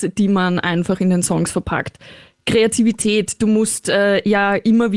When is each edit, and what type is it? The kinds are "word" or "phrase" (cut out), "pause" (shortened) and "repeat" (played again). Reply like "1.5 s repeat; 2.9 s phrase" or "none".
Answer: none